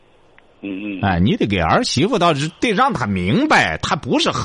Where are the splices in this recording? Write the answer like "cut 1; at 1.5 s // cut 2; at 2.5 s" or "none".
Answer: none